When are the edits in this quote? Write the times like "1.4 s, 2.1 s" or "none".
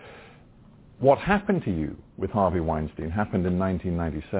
none